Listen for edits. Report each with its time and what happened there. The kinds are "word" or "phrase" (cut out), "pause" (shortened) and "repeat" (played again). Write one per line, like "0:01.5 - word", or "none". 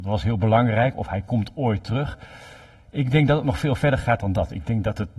none